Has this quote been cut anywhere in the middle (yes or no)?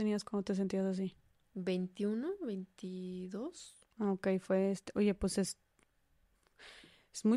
no